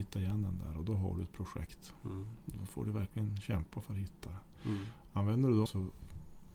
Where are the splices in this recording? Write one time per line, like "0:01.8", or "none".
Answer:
0:05.7